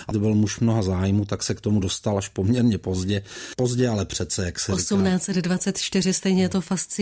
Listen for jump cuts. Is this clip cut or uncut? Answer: uncut